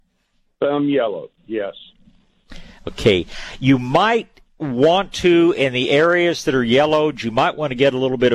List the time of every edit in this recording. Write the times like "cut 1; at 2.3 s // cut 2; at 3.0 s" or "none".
none

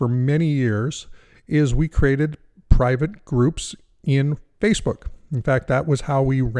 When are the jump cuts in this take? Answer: none

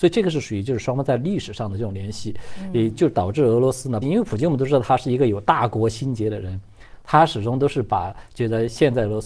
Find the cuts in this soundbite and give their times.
cut 1; at 4.0 s

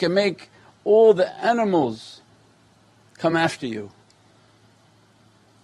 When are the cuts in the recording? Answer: none

